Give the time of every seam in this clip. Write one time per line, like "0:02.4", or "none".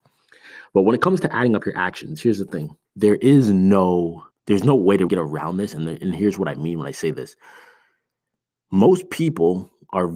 0:02.9
0:04.3
0:05.1